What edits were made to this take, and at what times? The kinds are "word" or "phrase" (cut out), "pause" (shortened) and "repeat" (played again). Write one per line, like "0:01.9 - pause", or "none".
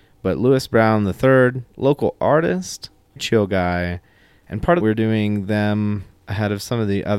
0:01.7 - pause
0:03.2 - word
0:04.8 - phrase